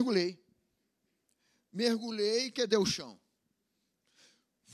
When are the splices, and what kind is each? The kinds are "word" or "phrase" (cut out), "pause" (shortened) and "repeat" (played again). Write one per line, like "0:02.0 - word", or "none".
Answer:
none